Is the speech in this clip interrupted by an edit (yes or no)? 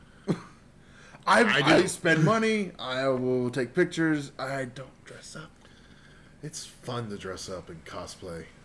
no